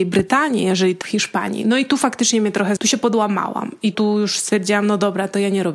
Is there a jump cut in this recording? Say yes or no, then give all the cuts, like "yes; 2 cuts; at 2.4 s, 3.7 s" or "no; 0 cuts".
yes; 3 cuts; at 1.0 s, 2.8 s, 3.9 s